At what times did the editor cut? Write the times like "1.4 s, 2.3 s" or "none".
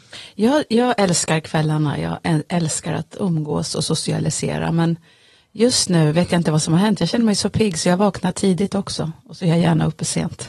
none